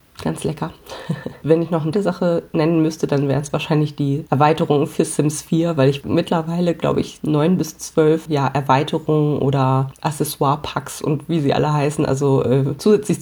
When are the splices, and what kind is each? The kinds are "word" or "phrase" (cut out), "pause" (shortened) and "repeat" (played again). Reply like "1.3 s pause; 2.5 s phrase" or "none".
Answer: 1.4 s word; 1.9 s word; 6.0 s word; 8.3 s word